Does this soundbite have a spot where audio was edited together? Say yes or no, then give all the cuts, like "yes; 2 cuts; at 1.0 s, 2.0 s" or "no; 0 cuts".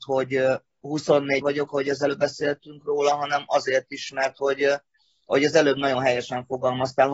yes; 1 cut; at 1.4 s